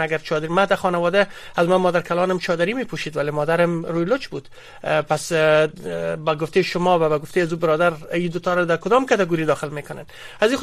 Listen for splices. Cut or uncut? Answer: uncut